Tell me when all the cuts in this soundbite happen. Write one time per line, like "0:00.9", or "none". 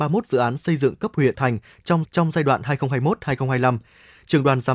0:01.3
0:02.0